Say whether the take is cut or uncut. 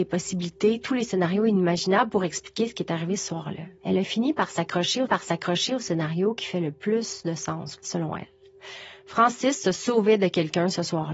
cut